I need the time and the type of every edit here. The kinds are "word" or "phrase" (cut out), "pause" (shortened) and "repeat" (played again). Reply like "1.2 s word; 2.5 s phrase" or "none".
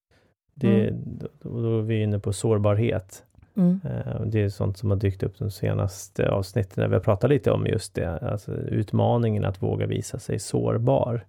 3.5 s pause